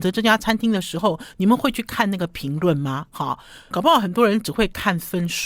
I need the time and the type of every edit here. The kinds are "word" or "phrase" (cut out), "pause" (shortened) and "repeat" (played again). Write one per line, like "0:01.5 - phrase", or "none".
0:03.7 - word